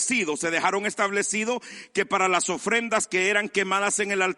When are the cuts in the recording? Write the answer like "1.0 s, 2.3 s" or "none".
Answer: none

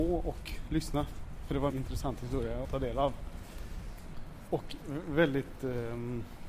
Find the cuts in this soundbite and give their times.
1.7 s, 2.6 s

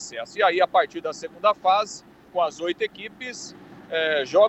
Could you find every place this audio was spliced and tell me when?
2.3 s

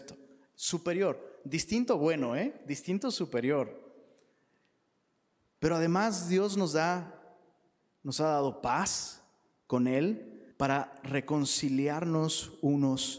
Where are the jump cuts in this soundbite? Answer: 10.5 s

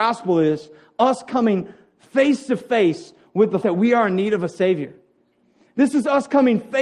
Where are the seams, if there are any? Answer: 3.6 s

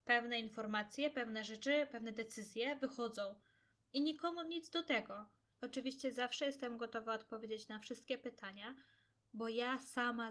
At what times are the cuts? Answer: none

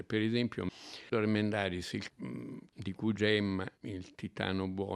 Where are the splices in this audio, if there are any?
1.1 s, 2.1 s, 3.2 s, 3.8 s

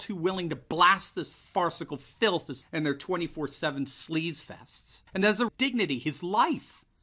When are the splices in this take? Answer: 2.6 s, 5.1 s, 5.5 s

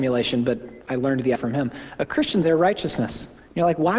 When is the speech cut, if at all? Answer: 1.4 s, 2.4 s

